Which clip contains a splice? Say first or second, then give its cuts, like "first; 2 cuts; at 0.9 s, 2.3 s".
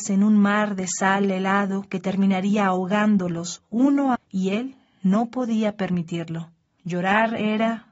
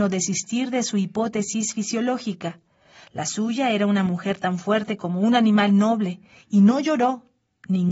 first; 1 cut; at 4.2 s